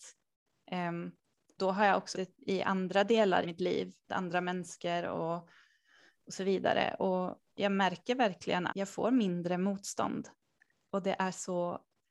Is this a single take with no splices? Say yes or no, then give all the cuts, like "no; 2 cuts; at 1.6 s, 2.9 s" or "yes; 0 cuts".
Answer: no; 6 cuts; at 1.6 s, 2.1 s, 3.4 s, 4.1 s, 7.5 s, 8.7 s